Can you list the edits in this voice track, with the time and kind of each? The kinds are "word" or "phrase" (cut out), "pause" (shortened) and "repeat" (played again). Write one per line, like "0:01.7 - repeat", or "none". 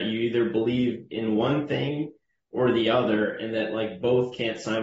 none